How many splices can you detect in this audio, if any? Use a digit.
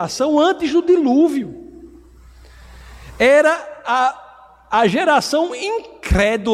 0